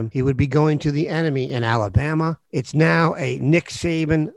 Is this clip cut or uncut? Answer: uncut